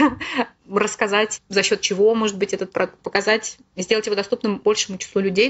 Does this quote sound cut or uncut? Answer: cut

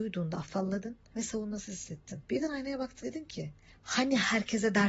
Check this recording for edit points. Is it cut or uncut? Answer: cut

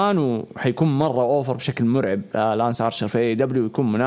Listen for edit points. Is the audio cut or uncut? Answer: uncut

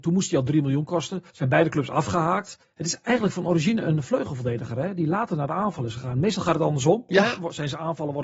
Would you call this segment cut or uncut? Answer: cut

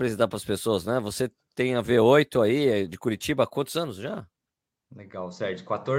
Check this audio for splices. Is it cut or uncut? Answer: uncut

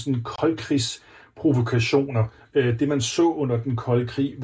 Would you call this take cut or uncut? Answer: uncut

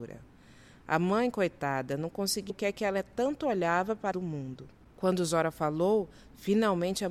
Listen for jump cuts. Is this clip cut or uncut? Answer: cut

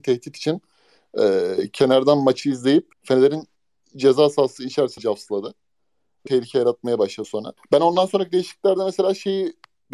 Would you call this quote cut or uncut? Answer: cut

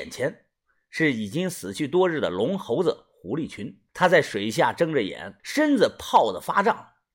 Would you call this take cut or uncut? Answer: cut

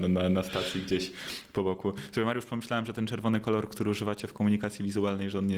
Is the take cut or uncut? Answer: uncut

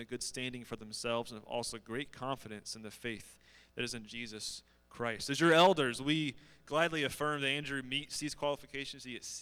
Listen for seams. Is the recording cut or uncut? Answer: uncut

